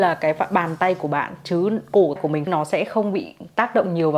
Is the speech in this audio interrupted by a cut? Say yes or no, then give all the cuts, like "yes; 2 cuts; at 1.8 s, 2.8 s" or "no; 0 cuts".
yes; 2 cuts; at 2.2 s, 2.5 s